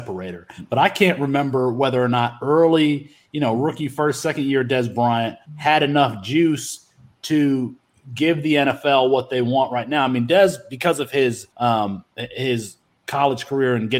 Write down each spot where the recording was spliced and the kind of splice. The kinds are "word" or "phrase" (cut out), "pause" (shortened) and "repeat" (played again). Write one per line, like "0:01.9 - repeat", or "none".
0:05.4 - pause
0:11.5 - pause

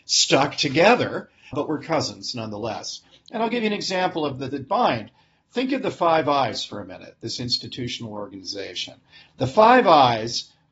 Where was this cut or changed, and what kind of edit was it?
0:01.5 - word
0:04.5 - word

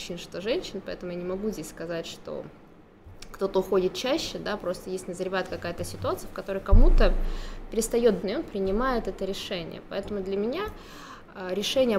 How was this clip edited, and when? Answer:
0:08.2 - phrase

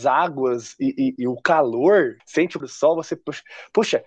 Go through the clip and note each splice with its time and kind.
0:01.2 - word
0:02.2 - phrase
0:02.6 - word

